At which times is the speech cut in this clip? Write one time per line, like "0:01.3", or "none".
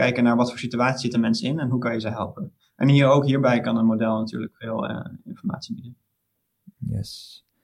none